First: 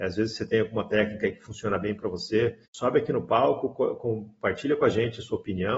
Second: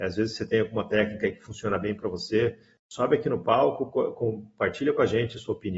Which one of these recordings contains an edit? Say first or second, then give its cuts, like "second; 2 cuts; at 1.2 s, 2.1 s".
first; 1 cut; at 2.7 s